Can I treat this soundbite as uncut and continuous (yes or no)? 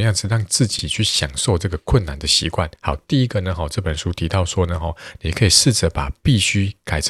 no